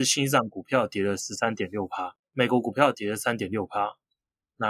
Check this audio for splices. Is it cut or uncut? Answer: cut